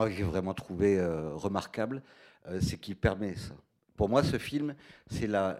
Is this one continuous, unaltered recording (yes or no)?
yes